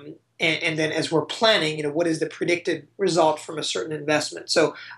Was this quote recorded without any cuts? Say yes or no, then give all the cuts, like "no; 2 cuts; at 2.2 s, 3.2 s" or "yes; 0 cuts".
yes; 0 cuts